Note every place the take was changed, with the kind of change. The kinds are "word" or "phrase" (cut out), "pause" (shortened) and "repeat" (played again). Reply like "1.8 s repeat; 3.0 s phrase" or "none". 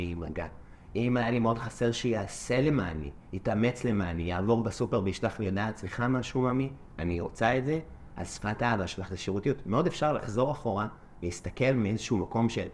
none